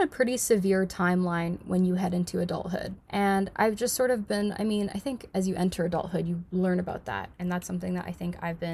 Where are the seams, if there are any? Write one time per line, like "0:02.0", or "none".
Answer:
0:03.0